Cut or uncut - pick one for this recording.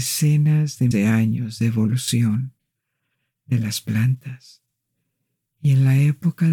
cut